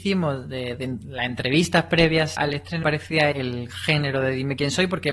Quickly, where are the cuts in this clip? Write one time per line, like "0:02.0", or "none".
0:02.4
0:02.8
0:03.3

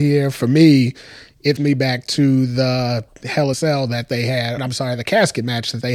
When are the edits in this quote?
0:01.6
0:03.5
0:04.6

